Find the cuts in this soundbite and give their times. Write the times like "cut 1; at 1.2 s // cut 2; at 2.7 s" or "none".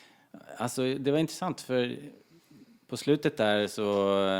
none